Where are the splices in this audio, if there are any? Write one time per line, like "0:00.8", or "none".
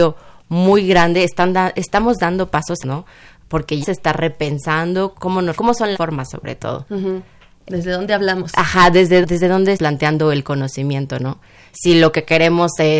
0:01.7
0:02.8
0:03.8
0:05.1
0:05.5
0:05.9
0:09.2
0:09.8